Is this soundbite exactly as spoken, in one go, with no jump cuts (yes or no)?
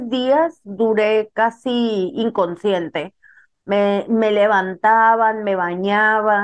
yes